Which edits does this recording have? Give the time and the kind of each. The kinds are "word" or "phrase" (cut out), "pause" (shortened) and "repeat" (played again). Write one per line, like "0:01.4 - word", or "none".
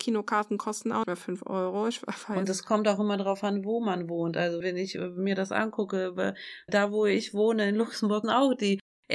0:01.0 - word
0:04.6 - word
0:06.7 - phrase
0:08.2 - word